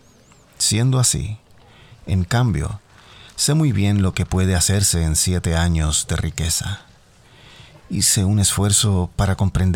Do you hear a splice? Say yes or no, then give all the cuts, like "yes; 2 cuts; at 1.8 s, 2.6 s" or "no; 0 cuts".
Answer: no; 0 cuts